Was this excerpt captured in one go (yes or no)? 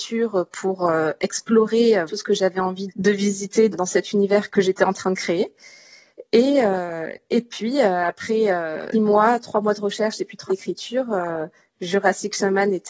no